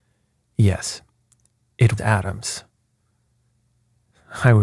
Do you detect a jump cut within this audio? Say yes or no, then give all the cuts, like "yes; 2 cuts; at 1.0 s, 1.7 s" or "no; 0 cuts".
yes; 1 cut; at 2.0 s